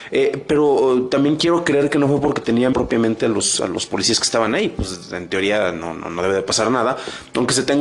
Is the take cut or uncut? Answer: cut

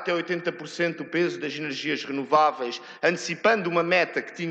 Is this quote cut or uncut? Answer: uncut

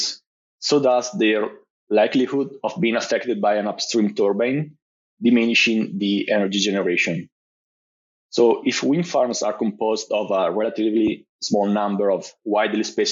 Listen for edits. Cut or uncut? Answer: uncut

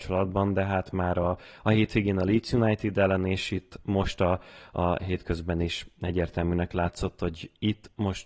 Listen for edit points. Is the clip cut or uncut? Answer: uncut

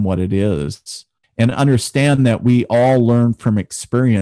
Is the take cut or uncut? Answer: cut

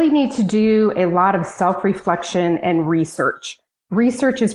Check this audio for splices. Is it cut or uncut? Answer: uncut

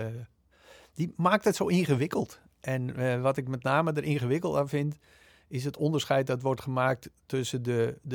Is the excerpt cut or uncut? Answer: uncut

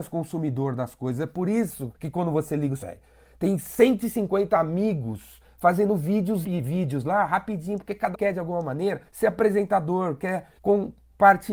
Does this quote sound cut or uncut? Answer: cut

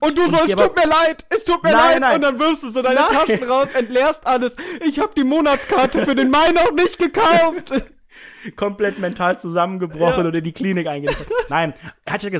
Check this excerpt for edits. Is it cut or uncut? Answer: uncut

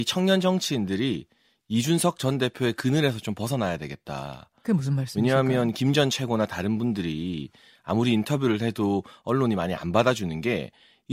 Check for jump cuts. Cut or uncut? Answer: uncut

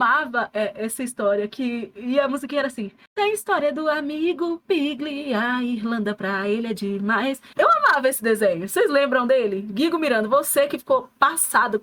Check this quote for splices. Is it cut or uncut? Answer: uncut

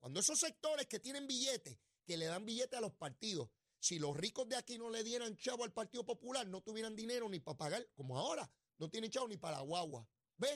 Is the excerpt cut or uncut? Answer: uncut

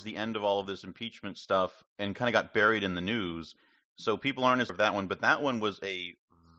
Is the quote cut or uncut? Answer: cut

